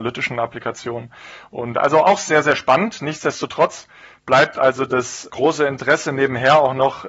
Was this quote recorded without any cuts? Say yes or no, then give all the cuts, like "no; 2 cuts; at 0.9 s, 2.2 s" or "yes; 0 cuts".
yes; 0 cuts